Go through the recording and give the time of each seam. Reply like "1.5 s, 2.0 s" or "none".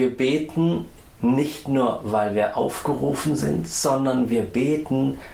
none